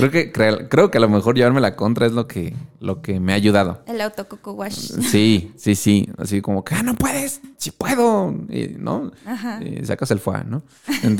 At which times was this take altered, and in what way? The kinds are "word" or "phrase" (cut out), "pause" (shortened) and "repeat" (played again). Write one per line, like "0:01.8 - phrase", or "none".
0:07.5 - pause